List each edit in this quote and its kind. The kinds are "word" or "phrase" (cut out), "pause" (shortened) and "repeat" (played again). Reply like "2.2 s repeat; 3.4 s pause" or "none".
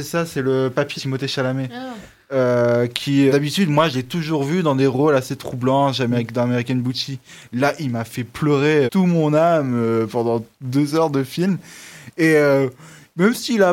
1.0 s word; 3.3 s word; 8.9 s word

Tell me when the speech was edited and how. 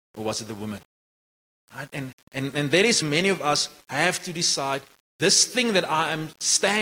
3.0 s word

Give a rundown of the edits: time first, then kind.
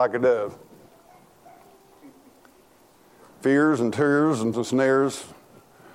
4.5 s word

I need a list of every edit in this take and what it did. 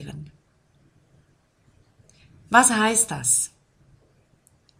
none

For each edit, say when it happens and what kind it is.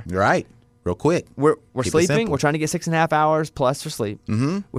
none

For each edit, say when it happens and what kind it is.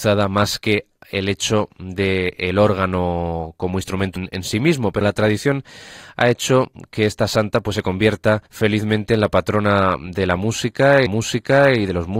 1.0 s pause; 4.2 s word; 5.0 s word; 8.5 s pause; 11.1 s repeat

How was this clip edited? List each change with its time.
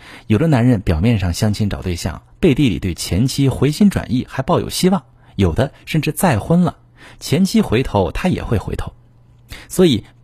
none

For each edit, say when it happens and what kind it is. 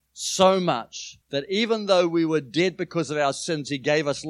1.2 s pause

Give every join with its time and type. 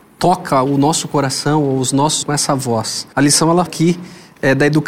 2.2 s word; 3.1 s pause; 3.7 s word

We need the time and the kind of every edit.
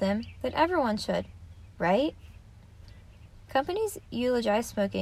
none

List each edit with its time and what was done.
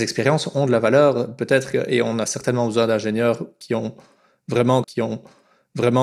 4.8 s repeat

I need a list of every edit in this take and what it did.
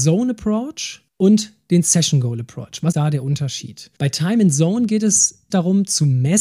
1.1 s pause; 2.9 s word; 4.0 s pause; 5.5 s word

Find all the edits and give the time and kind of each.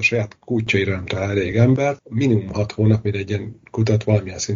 none

